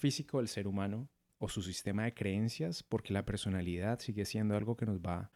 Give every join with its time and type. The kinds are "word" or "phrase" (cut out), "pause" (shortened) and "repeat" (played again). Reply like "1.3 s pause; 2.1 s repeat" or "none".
none